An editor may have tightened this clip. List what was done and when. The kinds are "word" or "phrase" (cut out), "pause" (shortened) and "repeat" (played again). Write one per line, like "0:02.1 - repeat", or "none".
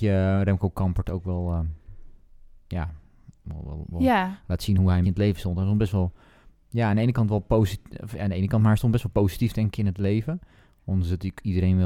0:05.0 - word